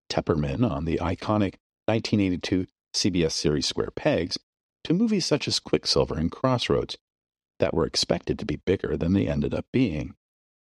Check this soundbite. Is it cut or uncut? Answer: uncut